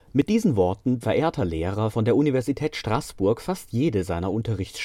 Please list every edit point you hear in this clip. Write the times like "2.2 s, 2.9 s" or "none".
1.0 s, 1.9 s